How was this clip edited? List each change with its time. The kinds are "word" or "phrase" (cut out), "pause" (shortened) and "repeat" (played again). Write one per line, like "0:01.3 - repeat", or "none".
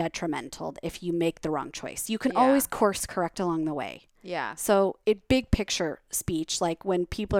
0:05.0 - word

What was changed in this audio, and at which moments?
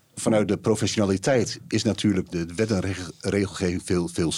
0:02.3 - word

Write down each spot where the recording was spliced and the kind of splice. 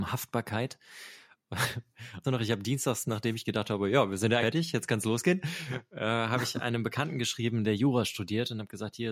0:02.2 - word
0:03.0 - word
0:04.4 - word

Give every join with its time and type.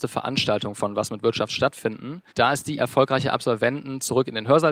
0:02.3 - pause
0:02.8 - word

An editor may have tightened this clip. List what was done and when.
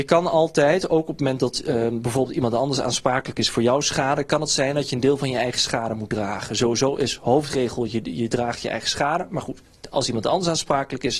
none

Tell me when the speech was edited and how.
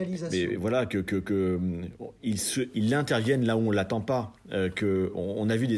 0:02.7 - word

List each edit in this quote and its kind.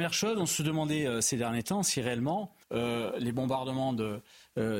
0:02.6 - pause

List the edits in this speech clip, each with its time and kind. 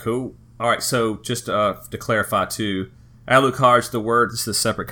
none

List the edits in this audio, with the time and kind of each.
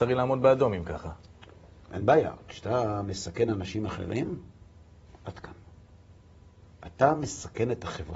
none

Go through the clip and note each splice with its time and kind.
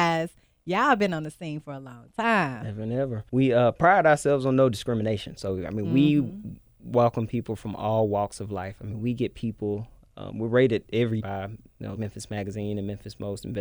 0:03.3 - pause
0:11.2 - word
0:12.0 - word

